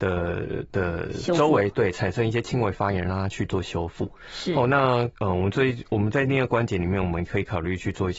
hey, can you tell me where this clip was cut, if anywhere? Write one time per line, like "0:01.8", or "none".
0:05.1